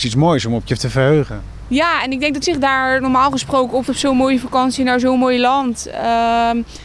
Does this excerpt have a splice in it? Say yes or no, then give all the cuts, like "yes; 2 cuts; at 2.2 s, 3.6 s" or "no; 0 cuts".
yes; 2 cuts; at 2.4 s, 3.9 s